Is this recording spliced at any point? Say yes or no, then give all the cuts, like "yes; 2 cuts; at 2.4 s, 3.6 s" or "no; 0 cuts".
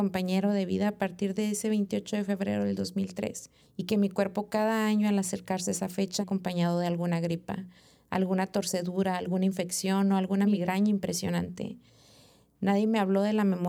yes; 2 cuts; at 3.6 s, 6.2 s